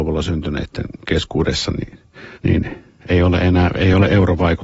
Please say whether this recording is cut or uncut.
cut